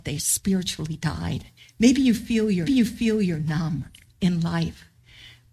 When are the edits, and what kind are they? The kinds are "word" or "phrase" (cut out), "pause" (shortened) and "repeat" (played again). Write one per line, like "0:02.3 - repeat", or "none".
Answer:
0:02.7 - repeat